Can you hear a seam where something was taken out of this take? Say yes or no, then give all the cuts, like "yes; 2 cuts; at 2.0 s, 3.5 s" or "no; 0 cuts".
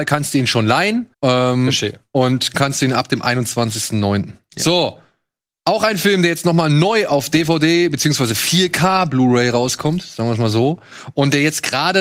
yes; 2 cuts; at 1.1 s, 2.5 s